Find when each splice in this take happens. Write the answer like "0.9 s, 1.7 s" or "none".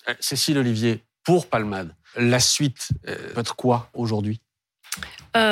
1.5 s, 2.1 s, 3.3 s, 3.9 s